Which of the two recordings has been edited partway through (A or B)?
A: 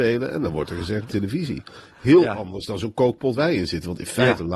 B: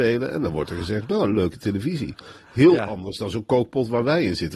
A